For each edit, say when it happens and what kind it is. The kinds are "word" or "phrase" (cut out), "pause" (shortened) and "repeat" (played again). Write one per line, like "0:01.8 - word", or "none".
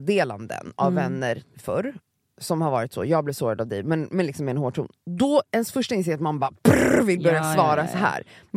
none